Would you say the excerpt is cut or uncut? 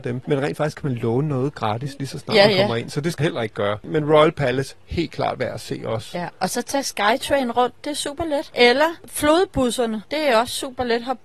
cut